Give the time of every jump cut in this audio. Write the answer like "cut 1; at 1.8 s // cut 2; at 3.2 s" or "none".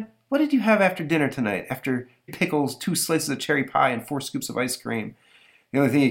cut 1; at 2.3 s